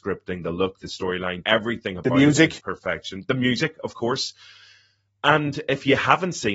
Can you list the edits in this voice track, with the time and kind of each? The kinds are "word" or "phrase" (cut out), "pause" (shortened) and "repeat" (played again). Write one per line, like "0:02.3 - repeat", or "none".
0:01.4 - word
0:02.6 - word